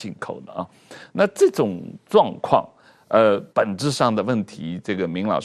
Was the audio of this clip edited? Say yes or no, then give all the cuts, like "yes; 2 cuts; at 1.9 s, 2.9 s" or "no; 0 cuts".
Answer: yes; 1 cut; at 3.5 s